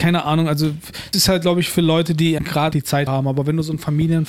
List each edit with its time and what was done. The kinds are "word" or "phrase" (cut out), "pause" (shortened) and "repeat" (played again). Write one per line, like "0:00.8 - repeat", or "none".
0:01.1 - word
0:02.4 - word
0:02.7 - word
0:03.1 - word